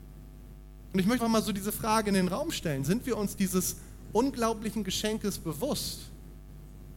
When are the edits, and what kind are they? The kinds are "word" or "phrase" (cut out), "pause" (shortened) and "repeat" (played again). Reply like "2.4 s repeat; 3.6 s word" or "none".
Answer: 1.2 s word